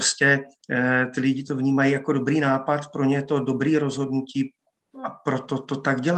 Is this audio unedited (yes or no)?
yes